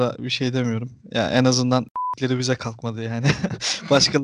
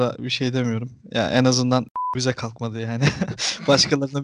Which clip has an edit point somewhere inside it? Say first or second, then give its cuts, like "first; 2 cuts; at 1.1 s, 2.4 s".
second; 1 cut; at 2.1 s